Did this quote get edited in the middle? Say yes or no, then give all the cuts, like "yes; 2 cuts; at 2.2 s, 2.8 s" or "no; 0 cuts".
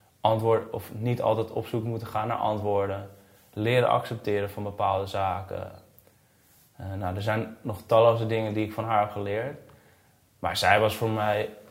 no; 0 cuts